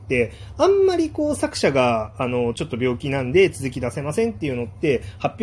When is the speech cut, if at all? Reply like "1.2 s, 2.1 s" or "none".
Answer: none